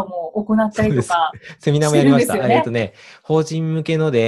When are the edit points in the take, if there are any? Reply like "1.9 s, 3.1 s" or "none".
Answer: none